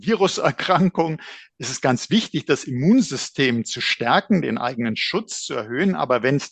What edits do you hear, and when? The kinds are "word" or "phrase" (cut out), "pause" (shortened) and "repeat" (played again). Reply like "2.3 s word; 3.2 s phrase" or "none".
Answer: none